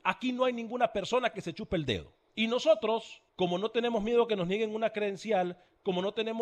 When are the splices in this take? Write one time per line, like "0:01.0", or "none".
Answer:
0:02.3
0:03.3